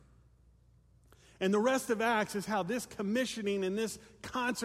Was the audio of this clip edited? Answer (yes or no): no